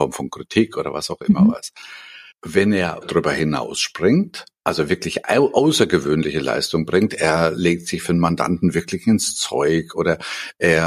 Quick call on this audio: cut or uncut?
cut